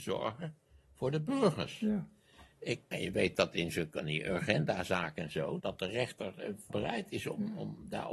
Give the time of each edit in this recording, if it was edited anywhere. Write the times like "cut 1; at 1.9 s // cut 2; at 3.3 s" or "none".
cut 1; at 2.9 s // cut 2; at 5.6 s // cut 3; at 6.7 s